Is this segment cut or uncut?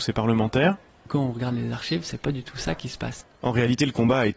cut